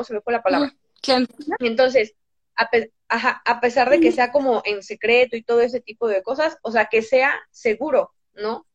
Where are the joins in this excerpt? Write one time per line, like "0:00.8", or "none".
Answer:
none

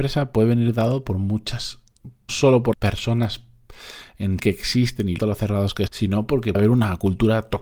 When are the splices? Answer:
0:02.3
0:02.7
0:04.4
0:05.2
0:05.9
0:06.5

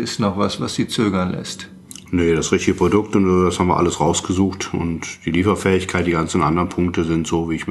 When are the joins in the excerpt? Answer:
none

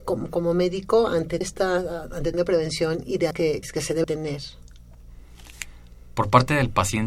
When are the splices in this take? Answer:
0:01.4
0:02.3
0:03.3
0:03.6
0:04.0

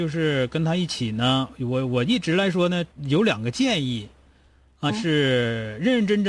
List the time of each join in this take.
0:02.9
0:04.9

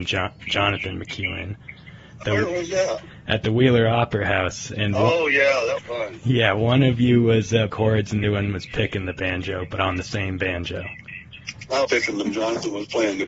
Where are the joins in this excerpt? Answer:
0:02.2
0:05.8
0:07.7
0:08.2
0:11.8
0:12.2

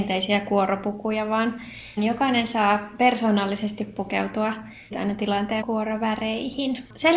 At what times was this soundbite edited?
0:02.0
0:04.9
0:05.6

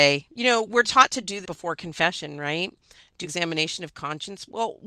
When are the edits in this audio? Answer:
0:01.4
0:03.2

